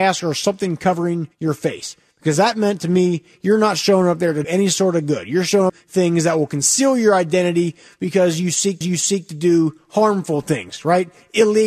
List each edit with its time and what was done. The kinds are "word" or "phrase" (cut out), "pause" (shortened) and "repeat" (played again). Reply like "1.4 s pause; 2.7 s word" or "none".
1.3 s pause; 4.4 s word; 5.7 s phrase; 8.8 s repeat